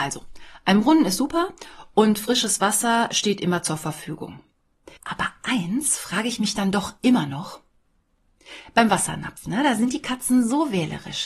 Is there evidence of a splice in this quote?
yes; 1 cut; at 5.0 s

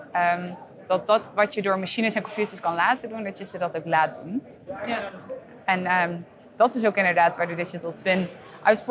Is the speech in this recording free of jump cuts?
yes; 0 cuts

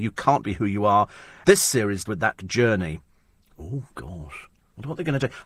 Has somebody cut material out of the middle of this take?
yes; 3 cuts; at 1.4 s, 2.1 s, 2.4 s

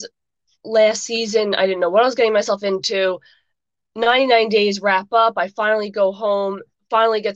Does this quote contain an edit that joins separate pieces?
no; 0 cuts

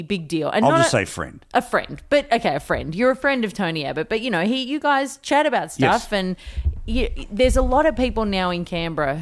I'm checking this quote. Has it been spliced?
no; 0 cuts

